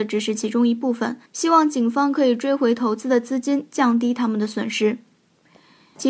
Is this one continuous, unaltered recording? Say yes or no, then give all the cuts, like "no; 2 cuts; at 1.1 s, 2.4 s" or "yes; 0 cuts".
no; 1 cut; at 1.3 s